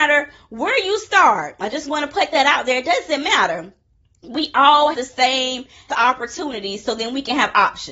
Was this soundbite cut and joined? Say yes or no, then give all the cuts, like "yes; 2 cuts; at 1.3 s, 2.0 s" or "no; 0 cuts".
yes; 2 cuts; at 4.9 s, 5.9 s